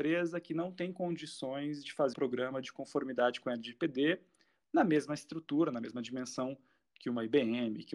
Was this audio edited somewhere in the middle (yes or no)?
yes